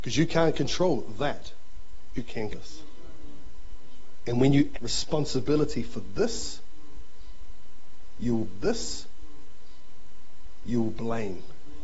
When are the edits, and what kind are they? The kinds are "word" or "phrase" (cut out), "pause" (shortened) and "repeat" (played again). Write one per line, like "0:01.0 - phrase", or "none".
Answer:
0:02.2 - word
0:02.5 - word
0:04.7 - word
0:08.5 - repeat